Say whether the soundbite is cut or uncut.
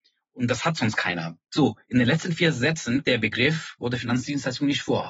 cut